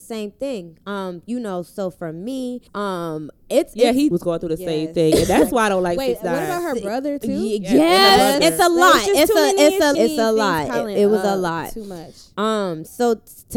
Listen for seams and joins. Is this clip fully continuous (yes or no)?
no